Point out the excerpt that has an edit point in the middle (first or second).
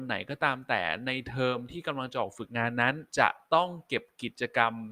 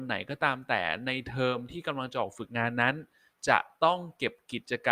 first